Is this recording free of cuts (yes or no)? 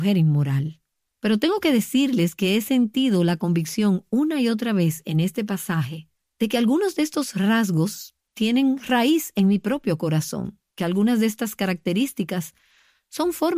no